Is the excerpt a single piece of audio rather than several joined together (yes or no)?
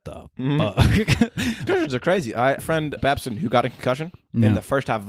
no